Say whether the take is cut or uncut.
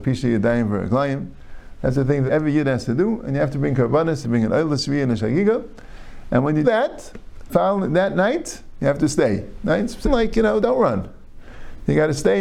cut